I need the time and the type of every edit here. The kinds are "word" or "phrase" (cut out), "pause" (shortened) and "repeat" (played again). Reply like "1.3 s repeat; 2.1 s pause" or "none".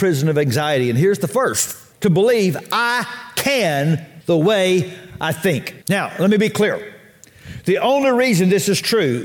1.9 s pause; 4.2 s word; 5.8 s pause